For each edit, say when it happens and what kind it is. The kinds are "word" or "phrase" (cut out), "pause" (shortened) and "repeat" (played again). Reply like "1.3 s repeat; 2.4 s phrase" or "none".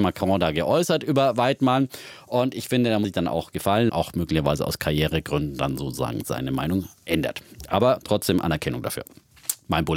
3.0 s word; 3.9 s phrase